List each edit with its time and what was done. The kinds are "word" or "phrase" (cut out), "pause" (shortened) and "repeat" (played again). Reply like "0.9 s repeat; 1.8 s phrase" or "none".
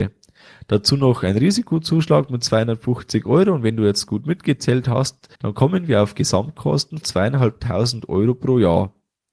5.3 s pause; 7.0 s word